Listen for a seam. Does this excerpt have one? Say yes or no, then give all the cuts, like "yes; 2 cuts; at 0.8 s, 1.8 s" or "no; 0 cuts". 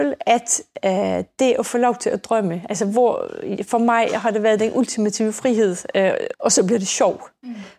yes; 1 cut; at 6.3 s